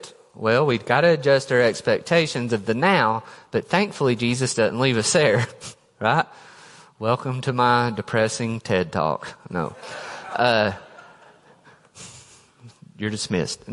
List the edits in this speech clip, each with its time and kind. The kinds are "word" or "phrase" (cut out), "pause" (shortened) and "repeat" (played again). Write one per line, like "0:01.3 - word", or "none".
none